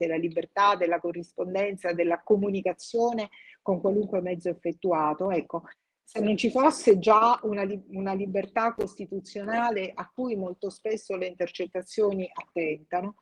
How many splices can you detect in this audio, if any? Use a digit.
0